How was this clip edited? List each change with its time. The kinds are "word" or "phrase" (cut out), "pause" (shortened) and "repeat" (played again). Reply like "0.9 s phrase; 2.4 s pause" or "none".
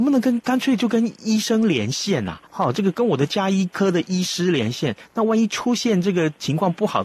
2.5 s pause